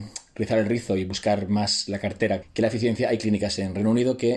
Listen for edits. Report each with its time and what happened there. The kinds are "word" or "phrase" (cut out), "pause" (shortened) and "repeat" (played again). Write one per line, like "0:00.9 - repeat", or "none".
0:02.4 - word

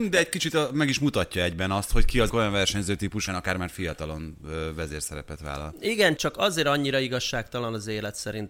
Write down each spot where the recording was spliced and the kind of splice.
0:02.3 - phrase
0:03.3 - phrase
0:06.2 - word

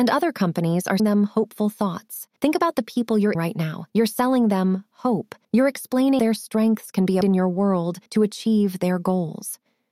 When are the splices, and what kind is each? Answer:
0:01.0 - word
0:02.4 - pause
0:03.3 - word
0:03.9 - pause
0:05.4 - pause
0:06.2 - word
0:07.2 - word
0:08.1 - pause

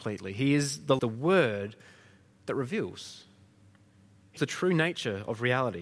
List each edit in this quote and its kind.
0:01.0 - word
0:04.4 - word

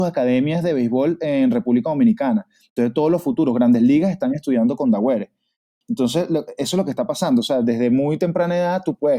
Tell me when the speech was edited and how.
none

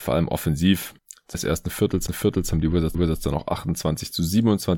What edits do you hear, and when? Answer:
0:01.3 - word
0:02.1 - repeat
0:02.9 - repeat

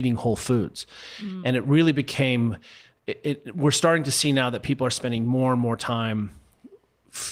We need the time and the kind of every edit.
none

